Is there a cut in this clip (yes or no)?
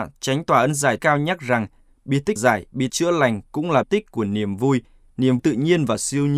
yes